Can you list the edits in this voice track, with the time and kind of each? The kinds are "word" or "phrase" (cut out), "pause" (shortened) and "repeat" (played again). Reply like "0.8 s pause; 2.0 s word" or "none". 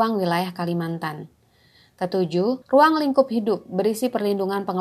2.6 s pause